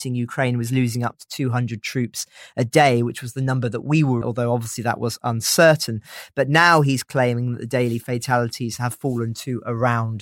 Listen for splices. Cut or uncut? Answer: cut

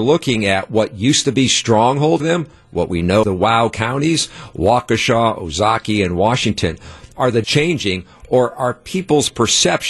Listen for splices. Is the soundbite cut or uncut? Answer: cut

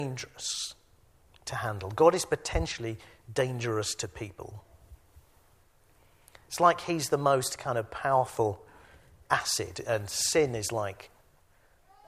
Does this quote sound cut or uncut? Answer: uncut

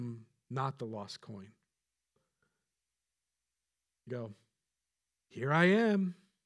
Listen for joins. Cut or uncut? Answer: cut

